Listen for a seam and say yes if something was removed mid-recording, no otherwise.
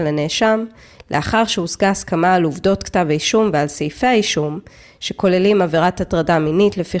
no